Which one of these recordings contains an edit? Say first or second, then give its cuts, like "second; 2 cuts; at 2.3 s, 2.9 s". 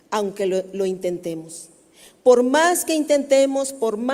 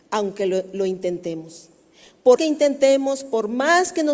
second; 1 cut; at 2.4 s